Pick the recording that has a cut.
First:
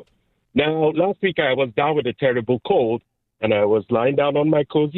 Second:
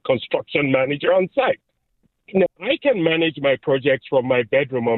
second; 1 cut; at 2.5 s

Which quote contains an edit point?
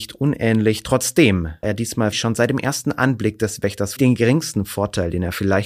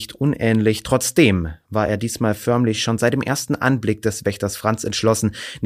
first; 3 cuts; at 1.6 s, 2.1 s, 4.0 s

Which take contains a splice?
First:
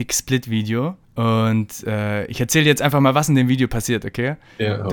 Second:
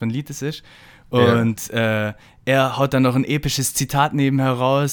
first; 1 cut; at 1.0 s

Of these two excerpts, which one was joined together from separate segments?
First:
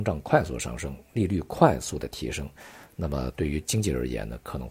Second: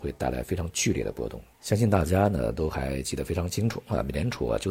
second; 1 cut; at 1.5 s

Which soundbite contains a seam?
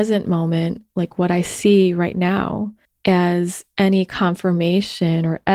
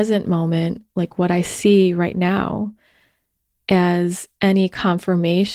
first; 1 cut; at 2.8 s

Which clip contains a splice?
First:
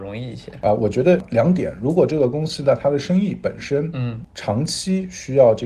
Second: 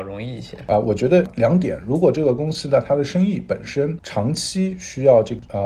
second; 1 cut; at 4.0 s

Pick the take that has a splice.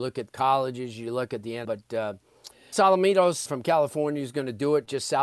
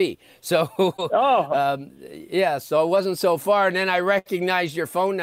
first; 3 cuts; at 1.6 s, 2.7 s, 3.5 s

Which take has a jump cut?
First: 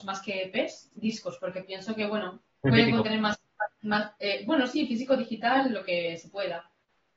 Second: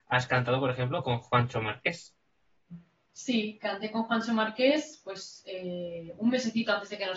first; 1 cut; at 2.5 s

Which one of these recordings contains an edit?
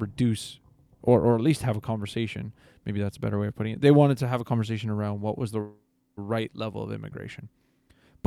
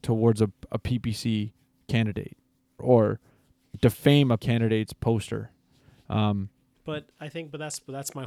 second; 4 cuts; at 2.8 s, 3.7 s, 4.4 s, 6.7 s

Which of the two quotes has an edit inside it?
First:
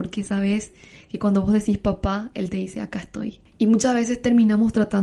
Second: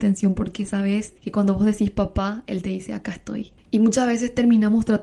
second; 1 cut; at 1.2 s

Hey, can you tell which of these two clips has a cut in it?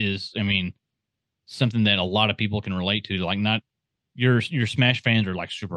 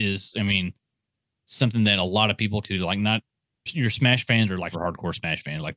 second; 3 cuts; at 2.6 s, 3.7 s, 4.7 s

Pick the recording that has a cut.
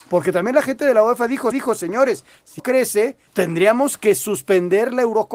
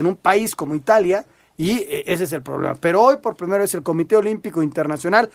first; 3 cuts; at 1.5 s, 2.6 s, 3.3 s

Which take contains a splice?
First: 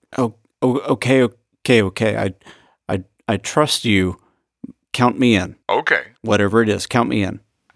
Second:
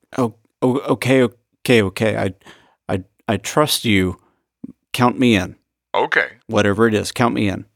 first; 1 cut; at 5.6 s

